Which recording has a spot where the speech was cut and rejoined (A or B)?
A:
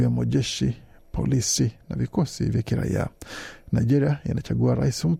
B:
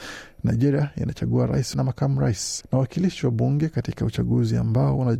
B